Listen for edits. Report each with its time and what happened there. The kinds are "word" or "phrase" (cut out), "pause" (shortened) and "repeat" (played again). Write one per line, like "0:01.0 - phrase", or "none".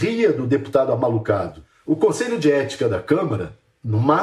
none